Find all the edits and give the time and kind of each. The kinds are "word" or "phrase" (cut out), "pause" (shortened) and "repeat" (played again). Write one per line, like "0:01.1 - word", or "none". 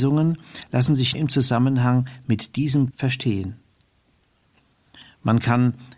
0:01.1 - word
0:02.9 - word